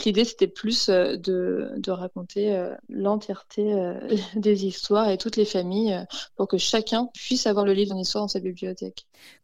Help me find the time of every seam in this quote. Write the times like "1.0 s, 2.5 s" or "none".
2.8 s, 7.9 s